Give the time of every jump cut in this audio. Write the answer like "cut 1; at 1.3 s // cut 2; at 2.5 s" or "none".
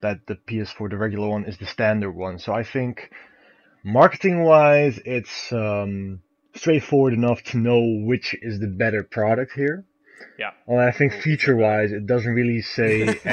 none